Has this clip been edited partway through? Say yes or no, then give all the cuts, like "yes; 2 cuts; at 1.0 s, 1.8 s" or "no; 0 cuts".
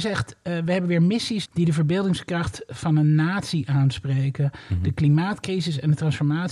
yes; 1 cut; at 1.5 s